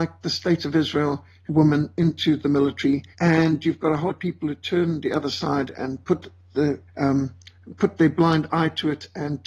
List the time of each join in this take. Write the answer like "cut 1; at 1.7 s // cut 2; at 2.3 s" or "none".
cut 1; at 1.5 s // cut 2; at 3.1 s // cut 3; at 4.1 s // cut 4; at 6.0 s // cut 5; at 6.9 s